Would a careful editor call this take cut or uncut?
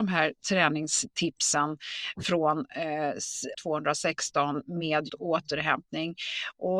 cut